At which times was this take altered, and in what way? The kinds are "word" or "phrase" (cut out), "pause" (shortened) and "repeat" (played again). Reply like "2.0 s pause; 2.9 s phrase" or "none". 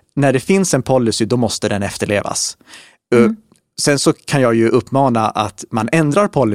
none